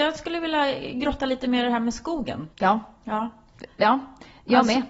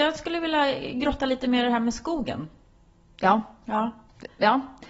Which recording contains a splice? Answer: first; 1 cut; at 2.5 s

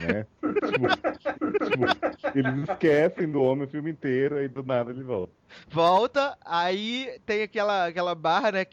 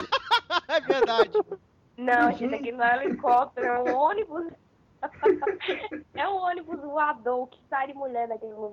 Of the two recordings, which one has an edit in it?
first; 1 cut; at 1.3 s

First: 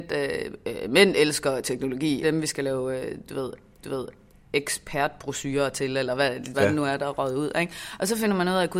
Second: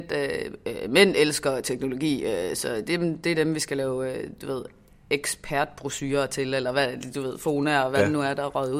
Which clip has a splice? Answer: first; 3 cuts; at 2.2 s, 3.8 s, 6.5 s

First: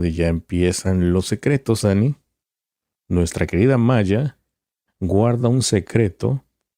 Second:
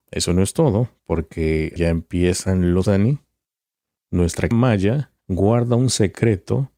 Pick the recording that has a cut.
second; 4 cuts; at 1.8 s, 2.8 s, 4.5 s, 5.2 s

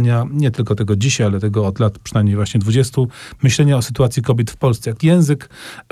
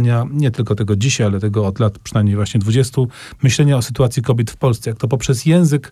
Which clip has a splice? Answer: first; 1 cut; at 5.0 s

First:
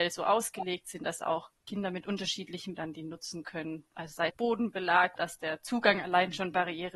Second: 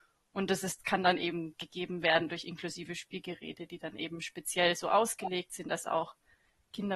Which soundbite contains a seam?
first; 4 cuts; at 1.6 s, 2.8 s, 4.3 s, 5.2 s

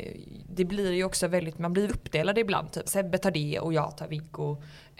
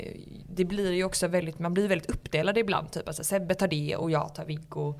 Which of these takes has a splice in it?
first; 2 cuts; at 1.9 s, 2.8 s

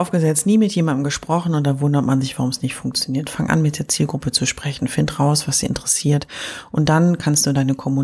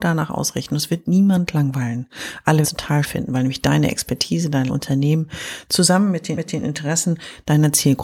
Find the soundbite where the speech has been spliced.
second; 4 cuts; at 2.6 s, 3.0 s, 4.7 s, 6.4 s

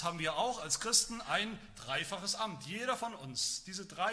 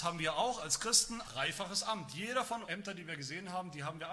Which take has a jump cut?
second; 2 cuts; at 1.2 s, 2.7 s

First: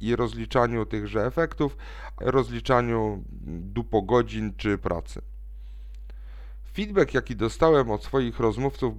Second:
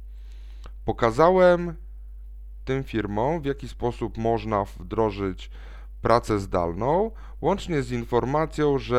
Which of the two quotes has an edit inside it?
first; 2 cuts; at 2.2 s, 4.8 s

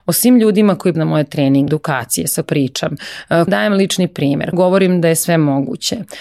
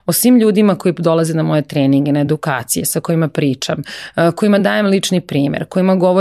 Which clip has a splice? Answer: first; 5 cuts; at 0.9 s, 1.7 s, 2.4 s, 3.5 s, 4.5 s

